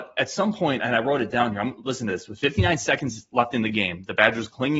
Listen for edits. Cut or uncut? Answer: uncut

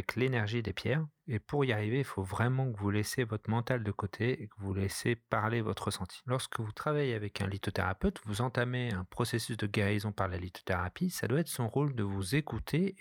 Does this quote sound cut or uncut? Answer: uncut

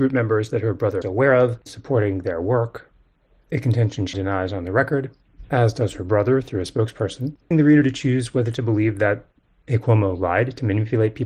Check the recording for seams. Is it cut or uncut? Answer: cut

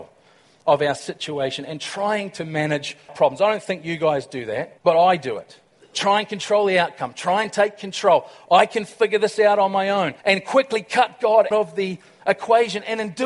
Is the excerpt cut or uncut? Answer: cut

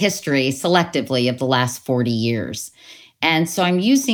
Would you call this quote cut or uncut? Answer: uncut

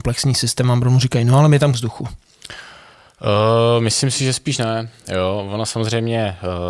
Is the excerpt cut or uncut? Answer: cut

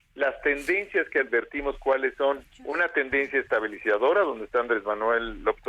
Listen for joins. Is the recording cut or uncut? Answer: uncut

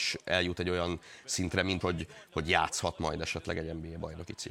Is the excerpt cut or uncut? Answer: cut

